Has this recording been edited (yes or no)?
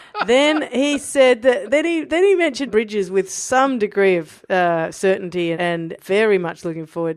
yes